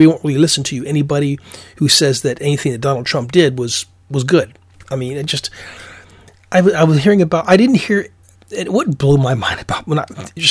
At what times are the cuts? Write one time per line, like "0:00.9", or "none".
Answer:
none